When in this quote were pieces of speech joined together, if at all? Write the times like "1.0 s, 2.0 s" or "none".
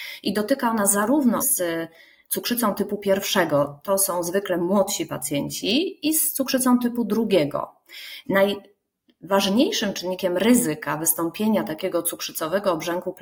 1.4 s